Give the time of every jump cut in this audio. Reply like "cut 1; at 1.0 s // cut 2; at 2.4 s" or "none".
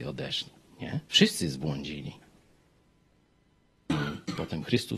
cut 1; at 1.0 s